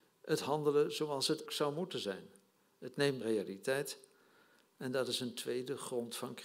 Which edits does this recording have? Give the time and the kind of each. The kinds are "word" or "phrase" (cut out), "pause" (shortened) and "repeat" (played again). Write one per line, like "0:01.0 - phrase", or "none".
0:01.5 - word
0:03.2 - phrase